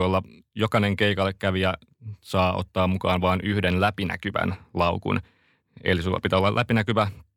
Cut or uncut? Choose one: uncut